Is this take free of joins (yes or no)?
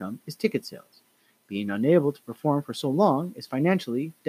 yes